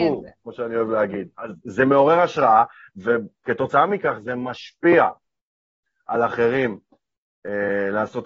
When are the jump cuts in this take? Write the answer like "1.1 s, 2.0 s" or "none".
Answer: none